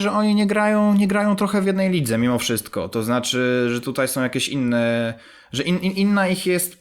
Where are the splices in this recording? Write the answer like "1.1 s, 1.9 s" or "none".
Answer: none